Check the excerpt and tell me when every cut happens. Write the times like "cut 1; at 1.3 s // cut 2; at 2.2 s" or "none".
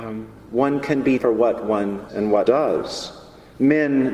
cut 1; at 1.2 s // cut 2; at 2.1 s // cut 3; at 2.5 s